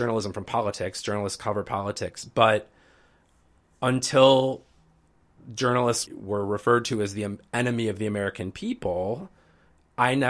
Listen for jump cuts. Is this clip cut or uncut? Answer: cut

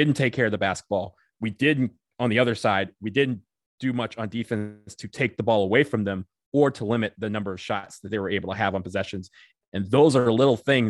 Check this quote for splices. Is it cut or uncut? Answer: uncut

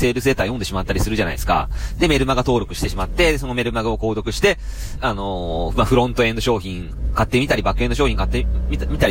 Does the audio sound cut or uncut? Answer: cut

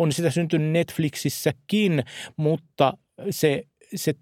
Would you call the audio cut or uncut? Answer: uncut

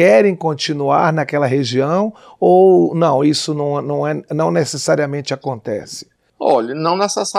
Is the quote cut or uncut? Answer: uncut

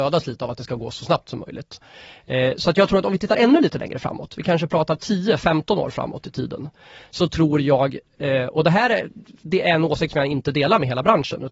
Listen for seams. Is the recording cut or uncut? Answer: uncut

